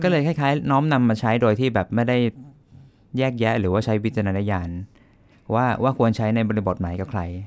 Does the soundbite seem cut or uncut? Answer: uncut